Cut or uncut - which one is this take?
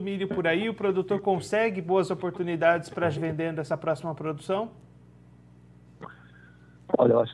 cut